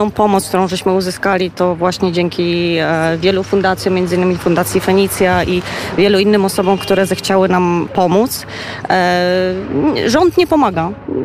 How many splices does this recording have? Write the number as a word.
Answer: zero